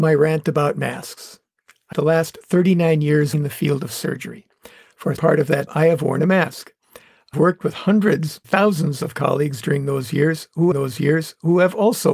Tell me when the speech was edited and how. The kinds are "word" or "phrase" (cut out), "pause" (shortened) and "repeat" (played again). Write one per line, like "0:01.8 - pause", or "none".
0:01.9 - phrase
0:03.3 - word
0:05.2 - word
0:05.7 - word
0:07.3 - word
0:08.4 - word
0:10.7 - repeat